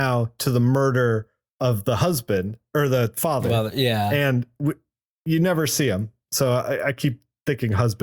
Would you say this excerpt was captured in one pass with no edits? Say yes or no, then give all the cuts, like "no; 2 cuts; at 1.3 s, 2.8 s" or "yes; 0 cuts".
yes; 0 cuts